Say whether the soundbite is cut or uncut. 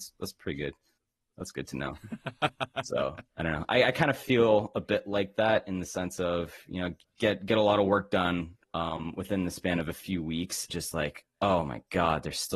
cut